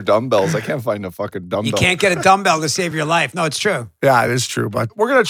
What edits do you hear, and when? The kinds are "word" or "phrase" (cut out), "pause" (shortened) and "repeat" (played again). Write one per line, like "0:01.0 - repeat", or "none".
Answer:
none